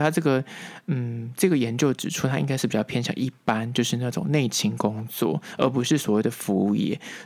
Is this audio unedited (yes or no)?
yes